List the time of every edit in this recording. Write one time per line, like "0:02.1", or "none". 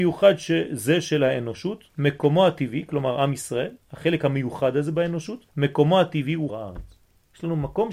0:01.9
0:05.5
0:06.5